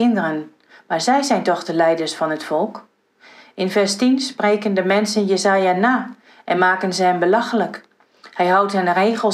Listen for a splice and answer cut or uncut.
uncut